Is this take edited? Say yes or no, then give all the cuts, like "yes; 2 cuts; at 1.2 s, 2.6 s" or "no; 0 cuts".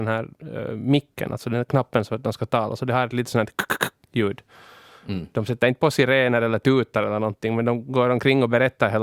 no; 0 cuts